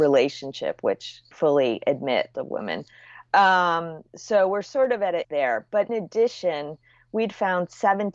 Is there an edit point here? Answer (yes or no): yes